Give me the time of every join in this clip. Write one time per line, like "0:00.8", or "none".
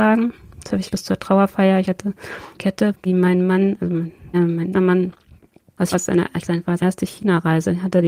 0:00.9
0:02.6
0:03.0
0:04.3
0:04.7
0:05.9
0:06.4
0:06.8